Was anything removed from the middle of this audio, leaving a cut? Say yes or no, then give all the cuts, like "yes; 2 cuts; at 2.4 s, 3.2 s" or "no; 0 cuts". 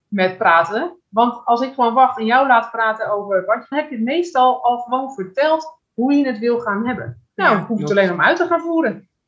yes; 2 cuts; at 3.7 s, 7.3 s